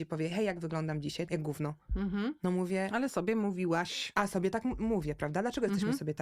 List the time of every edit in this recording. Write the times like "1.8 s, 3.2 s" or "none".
1.3 s